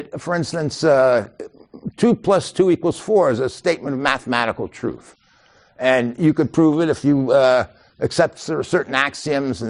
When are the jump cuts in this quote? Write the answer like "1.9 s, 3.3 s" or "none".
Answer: none